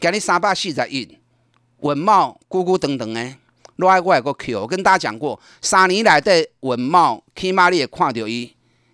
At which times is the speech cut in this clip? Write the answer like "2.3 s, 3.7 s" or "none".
1.5 s